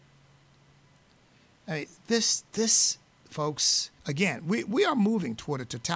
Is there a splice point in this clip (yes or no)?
yes